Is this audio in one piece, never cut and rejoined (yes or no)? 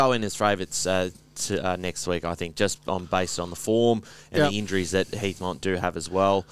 yes